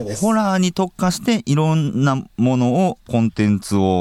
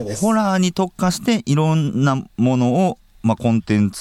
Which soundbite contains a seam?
first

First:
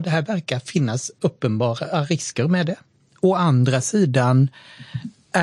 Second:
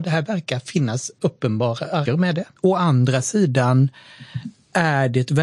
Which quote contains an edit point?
second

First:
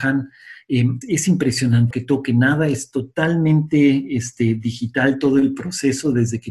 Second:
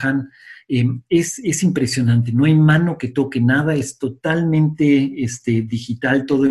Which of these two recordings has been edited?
first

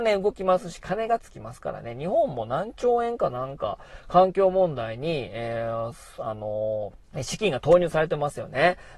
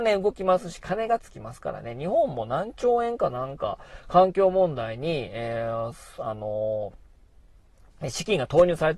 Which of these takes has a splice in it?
first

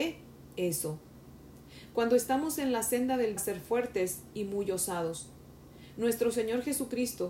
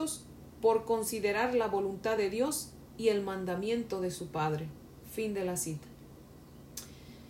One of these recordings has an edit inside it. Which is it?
first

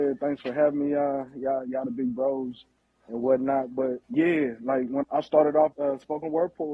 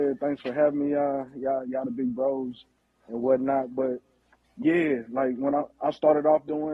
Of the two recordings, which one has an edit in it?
first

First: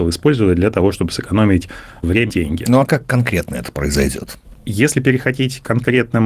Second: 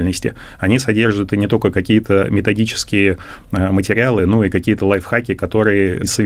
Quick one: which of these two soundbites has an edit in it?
first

